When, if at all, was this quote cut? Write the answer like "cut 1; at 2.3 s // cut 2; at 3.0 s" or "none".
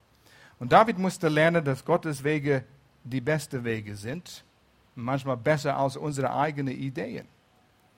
none